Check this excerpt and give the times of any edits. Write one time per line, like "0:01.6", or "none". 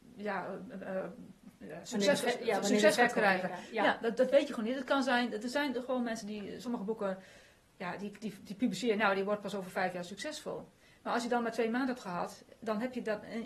none